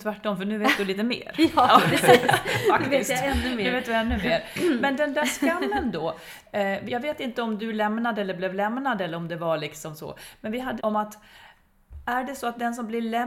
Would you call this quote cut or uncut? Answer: cut